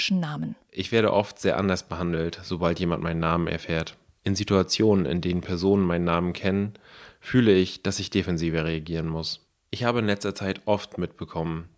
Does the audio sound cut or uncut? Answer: uncut